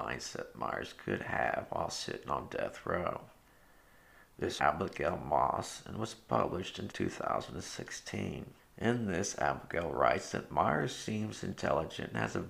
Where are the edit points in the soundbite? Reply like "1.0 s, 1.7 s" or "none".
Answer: 4.6 s, 6.9 s, 8.6 s